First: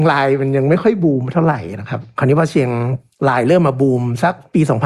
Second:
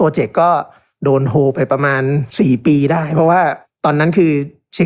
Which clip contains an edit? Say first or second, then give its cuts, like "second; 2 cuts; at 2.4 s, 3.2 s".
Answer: second; 1 cut; at 2.3 s